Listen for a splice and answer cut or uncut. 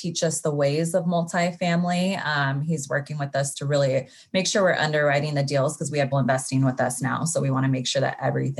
cut